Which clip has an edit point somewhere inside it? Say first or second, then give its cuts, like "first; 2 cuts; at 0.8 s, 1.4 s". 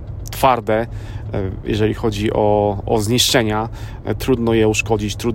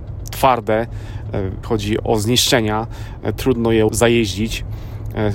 second; 3 cuts; at 1.6 s, 2.0 s, 3.9 s